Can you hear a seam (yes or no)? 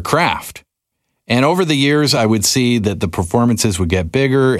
no